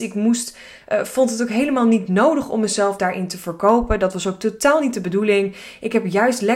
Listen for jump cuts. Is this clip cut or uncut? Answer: uncut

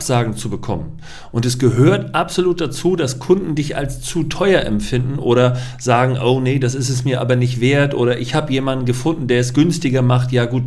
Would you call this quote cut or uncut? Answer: uncut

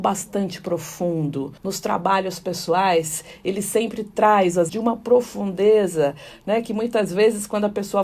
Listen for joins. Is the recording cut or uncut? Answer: cut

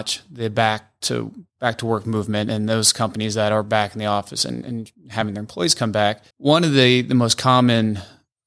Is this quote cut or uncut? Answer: cut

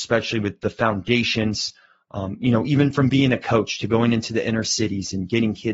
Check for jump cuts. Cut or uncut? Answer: uncut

